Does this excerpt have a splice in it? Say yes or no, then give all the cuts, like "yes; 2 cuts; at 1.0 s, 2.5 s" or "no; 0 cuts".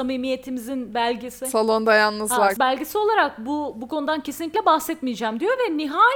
yes; 1 cut; at 2.6 s